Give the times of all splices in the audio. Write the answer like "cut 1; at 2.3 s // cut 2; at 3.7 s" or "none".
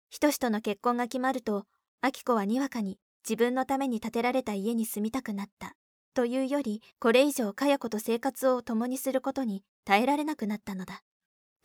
cut 1; at 6.9 s